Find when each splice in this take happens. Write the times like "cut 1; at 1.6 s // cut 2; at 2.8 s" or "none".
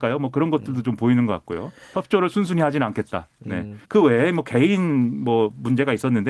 cut 1; at 3.8 s